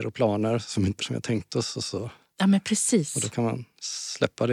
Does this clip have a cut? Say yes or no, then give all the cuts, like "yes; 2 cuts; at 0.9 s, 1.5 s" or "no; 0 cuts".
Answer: yes; 1 cut; at 1.0 s